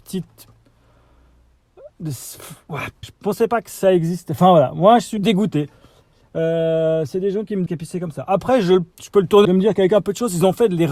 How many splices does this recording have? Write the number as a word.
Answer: six